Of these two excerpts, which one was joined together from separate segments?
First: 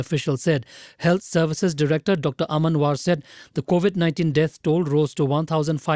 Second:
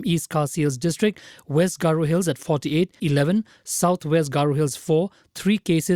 second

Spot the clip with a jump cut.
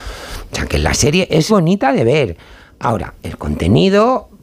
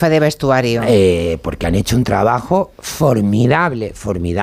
first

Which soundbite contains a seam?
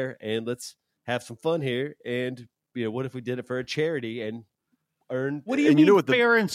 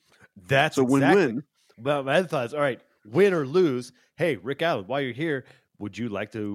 first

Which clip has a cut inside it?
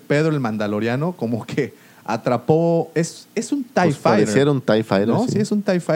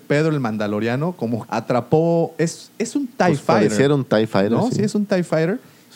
second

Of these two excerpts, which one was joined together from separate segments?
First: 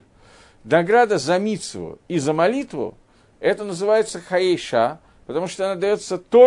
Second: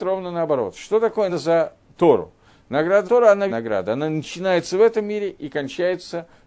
second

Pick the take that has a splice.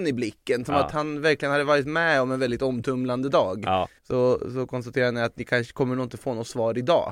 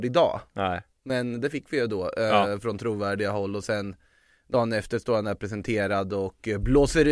first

